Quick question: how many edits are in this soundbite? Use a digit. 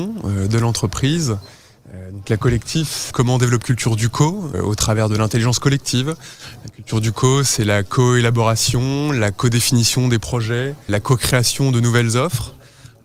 4